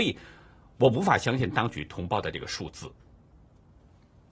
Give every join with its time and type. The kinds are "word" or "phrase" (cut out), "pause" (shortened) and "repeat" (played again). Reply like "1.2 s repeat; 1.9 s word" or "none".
none